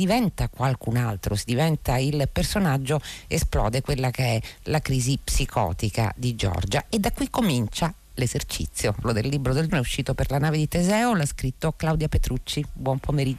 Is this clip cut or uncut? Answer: cut